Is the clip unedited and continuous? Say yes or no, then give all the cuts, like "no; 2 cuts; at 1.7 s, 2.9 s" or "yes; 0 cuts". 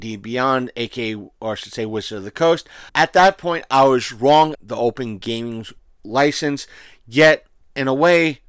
no; 3 cuts; at 2.9 s, 4.5 s, 5.8 s